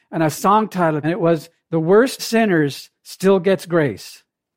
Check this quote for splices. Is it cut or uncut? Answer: cut